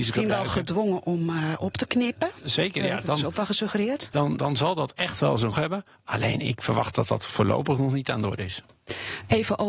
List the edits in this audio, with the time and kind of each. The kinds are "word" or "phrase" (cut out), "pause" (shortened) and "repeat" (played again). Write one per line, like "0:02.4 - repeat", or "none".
0:04.4 - word
0:05.5 - word